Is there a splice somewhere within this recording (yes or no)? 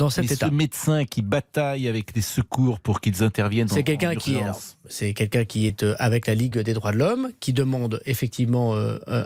no